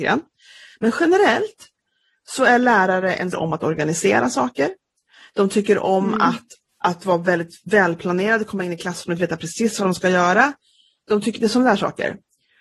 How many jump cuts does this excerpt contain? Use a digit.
1